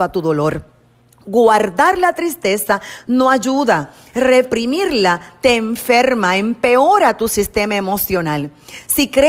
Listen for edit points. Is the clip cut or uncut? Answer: uncut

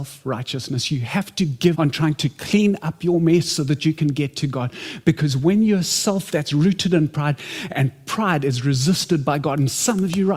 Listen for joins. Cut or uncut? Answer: cut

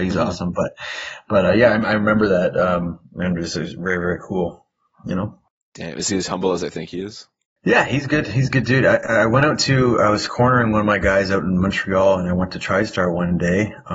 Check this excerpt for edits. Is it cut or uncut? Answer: uncut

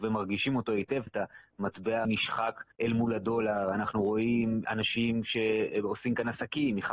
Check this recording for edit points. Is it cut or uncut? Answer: cut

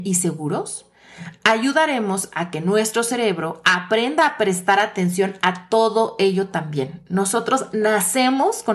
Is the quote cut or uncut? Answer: uncut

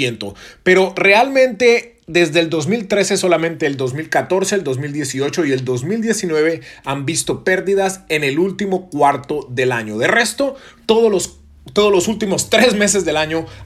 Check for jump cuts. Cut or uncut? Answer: uncut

